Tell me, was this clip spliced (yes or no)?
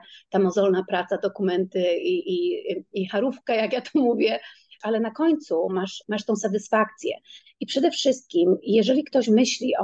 no